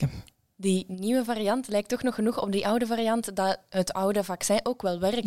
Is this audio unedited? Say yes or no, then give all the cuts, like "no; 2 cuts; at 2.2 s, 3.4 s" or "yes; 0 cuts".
yes; 0 cuts